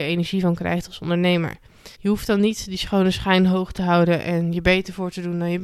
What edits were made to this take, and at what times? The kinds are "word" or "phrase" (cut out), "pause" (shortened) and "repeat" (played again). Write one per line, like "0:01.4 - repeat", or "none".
0:01.9 - pause